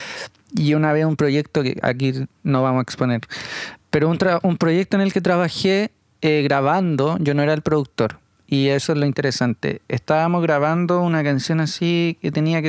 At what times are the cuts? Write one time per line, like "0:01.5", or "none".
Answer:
none

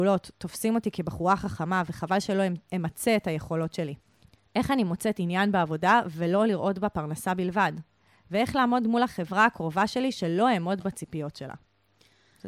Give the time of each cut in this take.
none

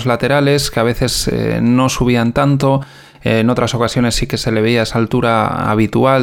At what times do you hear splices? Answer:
none

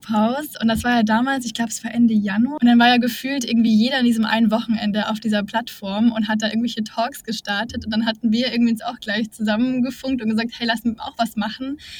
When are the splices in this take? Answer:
none

